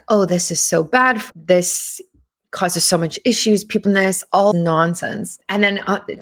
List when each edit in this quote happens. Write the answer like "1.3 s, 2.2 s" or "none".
1.3 s, 3.8 s, 4.5 s